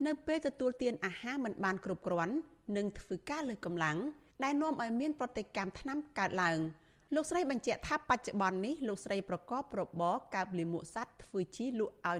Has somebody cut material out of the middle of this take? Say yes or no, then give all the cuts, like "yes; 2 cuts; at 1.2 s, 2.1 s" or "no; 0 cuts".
no; 0 cuts